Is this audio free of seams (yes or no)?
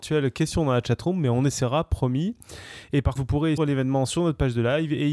no